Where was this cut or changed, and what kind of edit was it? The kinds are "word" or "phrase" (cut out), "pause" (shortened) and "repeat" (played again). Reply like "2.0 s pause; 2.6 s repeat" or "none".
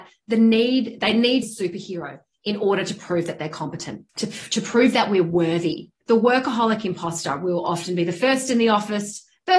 1.4 s phrase; 4.1 s pause; 6.0 s word

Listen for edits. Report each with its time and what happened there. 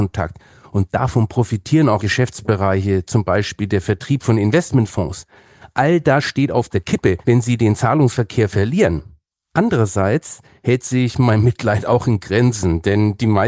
2.0 s word; 7.2 s pause

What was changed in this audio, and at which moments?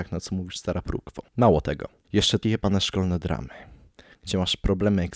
1.3 s pause; 2.0 s pause; 2.4 s word

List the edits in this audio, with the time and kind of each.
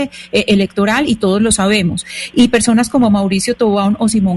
none

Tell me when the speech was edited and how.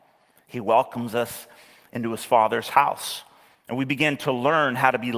3.5 s pause

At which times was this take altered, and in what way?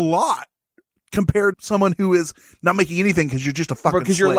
1.5 s word

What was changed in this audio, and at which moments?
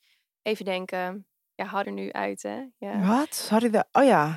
1.5 s pause; 1.8 s word

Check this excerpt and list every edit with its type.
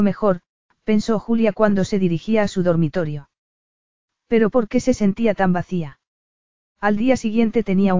none

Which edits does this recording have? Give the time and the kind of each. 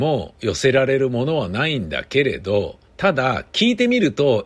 2.9 s pause

